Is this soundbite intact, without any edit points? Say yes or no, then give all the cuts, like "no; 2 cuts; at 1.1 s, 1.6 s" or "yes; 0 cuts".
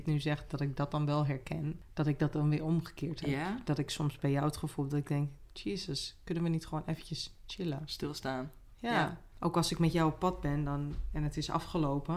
yes; 0 cuts